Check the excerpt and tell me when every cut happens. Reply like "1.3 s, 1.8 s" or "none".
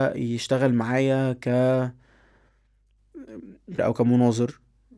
3.8 s